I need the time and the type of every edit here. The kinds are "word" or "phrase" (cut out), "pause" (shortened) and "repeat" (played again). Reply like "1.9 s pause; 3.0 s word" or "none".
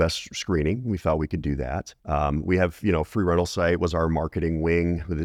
2.0 s pause